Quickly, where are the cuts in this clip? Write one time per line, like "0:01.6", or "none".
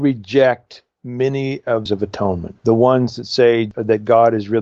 0:01.9
0:02.6